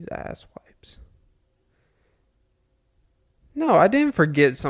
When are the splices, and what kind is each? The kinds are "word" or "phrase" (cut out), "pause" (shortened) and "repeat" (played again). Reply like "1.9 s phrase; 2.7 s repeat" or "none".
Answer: none